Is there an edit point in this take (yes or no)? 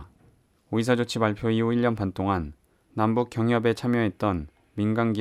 no